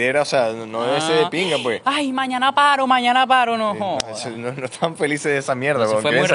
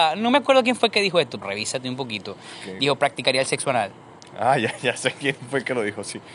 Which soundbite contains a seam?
second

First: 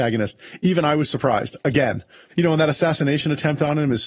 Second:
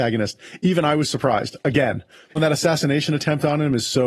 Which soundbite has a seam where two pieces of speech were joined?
second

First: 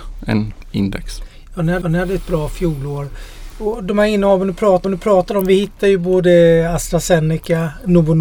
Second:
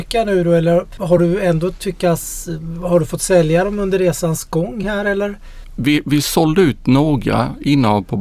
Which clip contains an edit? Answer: first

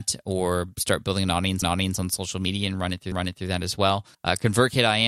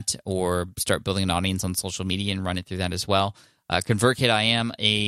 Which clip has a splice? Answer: first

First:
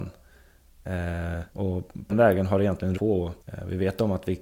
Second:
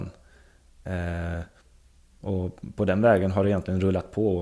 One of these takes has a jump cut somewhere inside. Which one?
first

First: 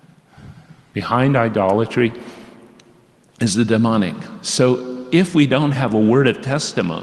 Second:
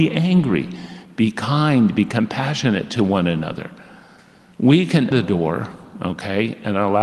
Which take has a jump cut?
second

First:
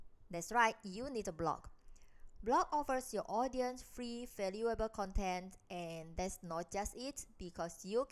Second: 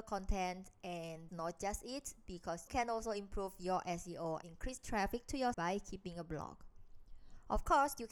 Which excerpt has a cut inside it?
second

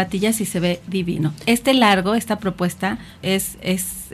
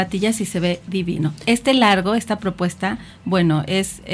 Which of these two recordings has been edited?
first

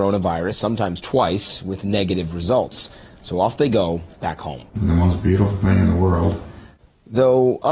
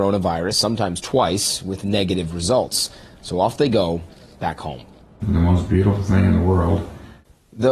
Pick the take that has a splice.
first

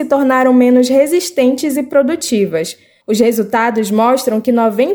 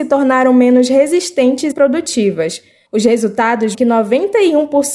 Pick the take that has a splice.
second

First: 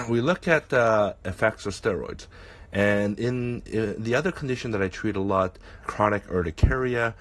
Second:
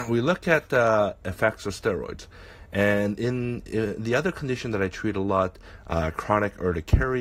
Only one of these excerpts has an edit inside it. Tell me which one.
first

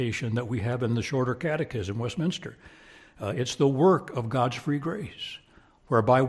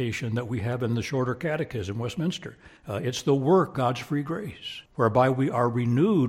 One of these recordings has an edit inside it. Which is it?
second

